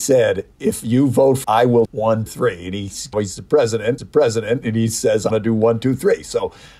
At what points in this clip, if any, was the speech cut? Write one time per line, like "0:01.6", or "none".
0:01.4
0:01.9
0:02.3
0:03.1
0:04.0
0:05.3

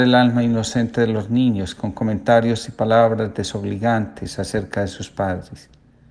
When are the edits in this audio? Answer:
none

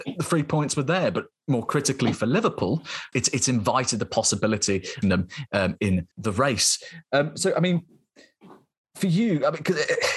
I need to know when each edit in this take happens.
0:03.1
0:05.0
0:06.1

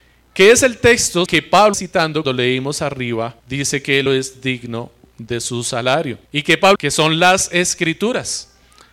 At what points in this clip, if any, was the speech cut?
0:01.3
0:01.7
0:02.2
0:03.4
0:04.1
0:06.3
0:06.8

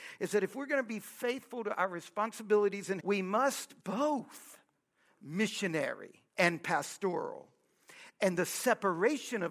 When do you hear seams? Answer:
0:03.0
0:03.8
0:06.3

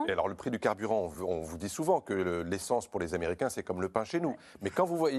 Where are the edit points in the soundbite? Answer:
none

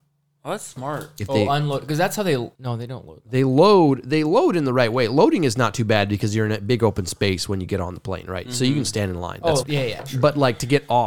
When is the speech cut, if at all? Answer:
0:02.5
0:09.6

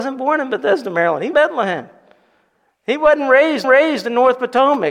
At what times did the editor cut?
0:01.3
0:03.6

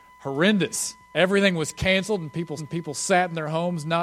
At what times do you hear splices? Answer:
0:01.0
0:02.6

